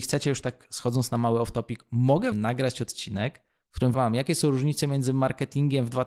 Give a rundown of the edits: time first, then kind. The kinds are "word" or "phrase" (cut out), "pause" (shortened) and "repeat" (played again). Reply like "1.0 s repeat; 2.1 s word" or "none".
2.3 s word; 3.9 s word